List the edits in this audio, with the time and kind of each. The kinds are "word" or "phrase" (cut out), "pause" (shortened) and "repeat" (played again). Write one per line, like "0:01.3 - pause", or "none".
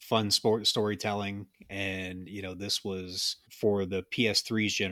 0:03.4 - pause